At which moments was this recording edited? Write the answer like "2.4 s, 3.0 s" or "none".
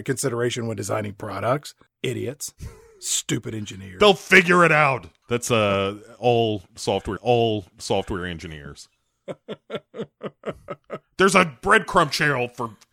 7.2 s